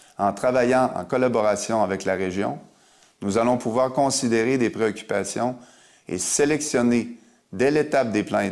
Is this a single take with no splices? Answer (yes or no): yes